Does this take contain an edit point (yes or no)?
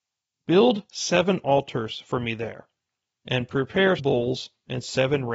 yes